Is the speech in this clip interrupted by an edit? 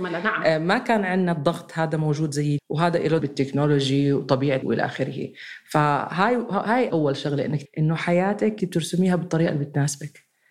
yes; 6 cuts; at 2.6 s, 3.2 s, 4.6 s, 6.9 s, 7.6 s, 8.6 s

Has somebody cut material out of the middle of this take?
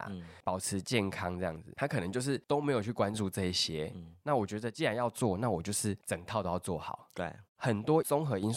yes; 1 cut; at 7.5 s

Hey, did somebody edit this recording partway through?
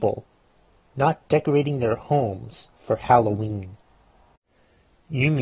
yes; 1 cut; at 2.7 s

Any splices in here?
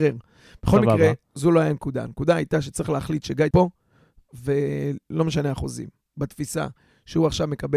yes; 1 cut; at 3.5 s

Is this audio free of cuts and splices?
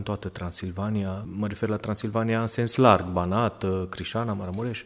yes; 0 cuts

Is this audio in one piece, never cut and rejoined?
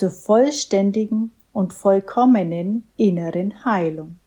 yes; 0 cuts

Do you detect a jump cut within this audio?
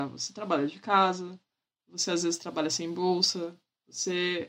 no; 0 cuts

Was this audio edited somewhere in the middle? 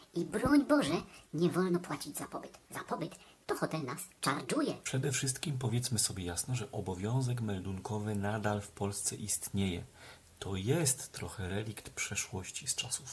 yes; 2 cuts; at 2.6 s, 4.2 s

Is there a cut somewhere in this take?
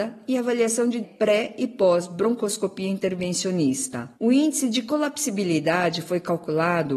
yes; 2 cuts; at 1.0 s, 4.1 s

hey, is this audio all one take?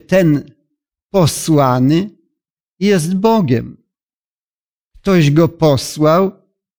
yes; 0 cuts

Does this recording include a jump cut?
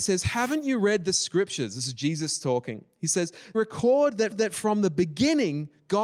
yes; 2 cuts; at 3.5 s, 4.3 s

